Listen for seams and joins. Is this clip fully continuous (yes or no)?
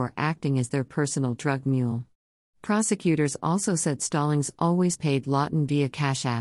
yes